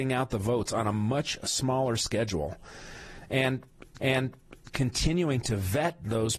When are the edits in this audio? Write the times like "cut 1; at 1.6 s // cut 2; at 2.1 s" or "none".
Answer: cut 1; at 4.0 s